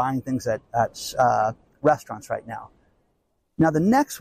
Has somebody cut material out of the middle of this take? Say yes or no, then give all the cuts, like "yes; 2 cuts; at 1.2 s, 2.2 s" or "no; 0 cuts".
no; 0 cuts